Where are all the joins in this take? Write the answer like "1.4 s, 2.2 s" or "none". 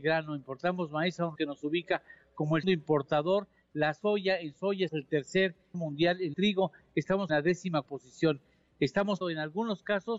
1.4 s, 2.6 s, 4.9 s, 5.7 s, 6.3 s, 7.3 s, 7.8 s, 9.2 s